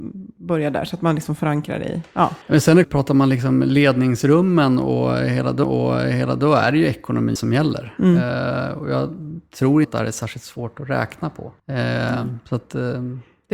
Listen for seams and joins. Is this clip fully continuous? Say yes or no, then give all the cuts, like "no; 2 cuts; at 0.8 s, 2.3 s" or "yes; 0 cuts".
no; 6 cuts; at 2.4 s, 2.8 s, 5.6 s, 7.4 s, 9.8 s, 11.6 s